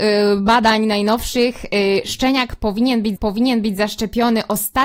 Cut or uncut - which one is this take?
cut